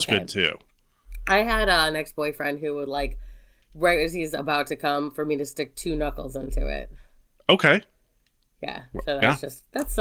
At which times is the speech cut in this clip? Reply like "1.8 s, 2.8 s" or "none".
none